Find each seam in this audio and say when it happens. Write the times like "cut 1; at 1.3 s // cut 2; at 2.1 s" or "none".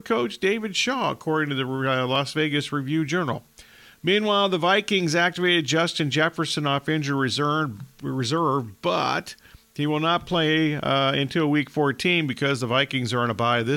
none